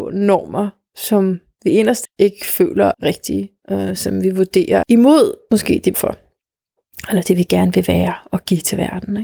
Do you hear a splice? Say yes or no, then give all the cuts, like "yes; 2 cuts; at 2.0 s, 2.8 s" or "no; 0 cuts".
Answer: yes; 4 cuts; at 2.0 s, 2.9 s, 4.8 s, 5.9 s